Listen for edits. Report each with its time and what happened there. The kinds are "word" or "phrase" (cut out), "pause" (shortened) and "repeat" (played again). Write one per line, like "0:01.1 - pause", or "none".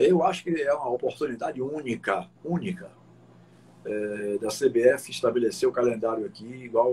0:02.3 - pause